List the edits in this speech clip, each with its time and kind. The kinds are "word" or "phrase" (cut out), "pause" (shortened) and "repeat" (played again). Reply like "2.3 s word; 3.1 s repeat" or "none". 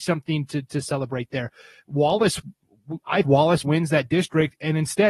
3.2 s word; 3.6 s word